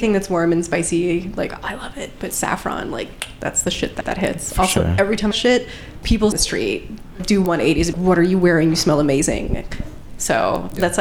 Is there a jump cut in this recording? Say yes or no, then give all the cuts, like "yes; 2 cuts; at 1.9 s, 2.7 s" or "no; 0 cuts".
yes; 3 cuts; at 5.3 s, 6.3 s, 7.9 s